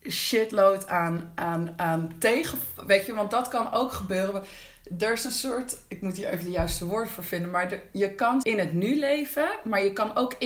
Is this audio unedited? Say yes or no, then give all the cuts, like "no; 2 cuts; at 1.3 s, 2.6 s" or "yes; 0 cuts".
no; 1 cut; at 8.4 s